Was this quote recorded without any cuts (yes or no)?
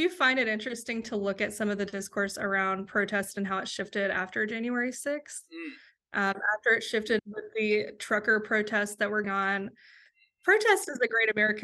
no